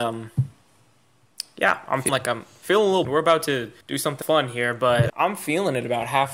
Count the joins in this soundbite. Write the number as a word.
five